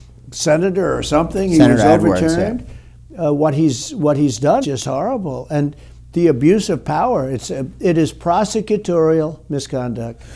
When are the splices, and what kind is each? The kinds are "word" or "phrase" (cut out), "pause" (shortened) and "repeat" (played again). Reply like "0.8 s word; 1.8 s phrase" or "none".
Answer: 4.6 s word